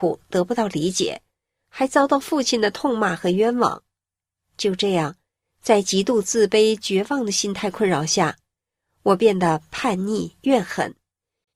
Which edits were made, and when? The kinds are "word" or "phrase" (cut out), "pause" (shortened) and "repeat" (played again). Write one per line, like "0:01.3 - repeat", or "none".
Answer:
none